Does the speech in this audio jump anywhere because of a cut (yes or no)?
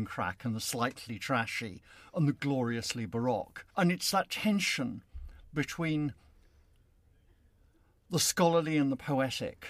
yes